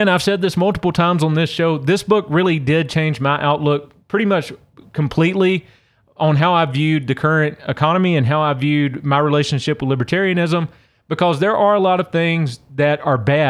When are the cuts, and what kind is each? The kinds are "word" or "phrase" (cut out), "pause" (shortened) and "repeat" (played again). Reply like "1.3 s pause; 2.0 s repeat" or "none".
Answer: none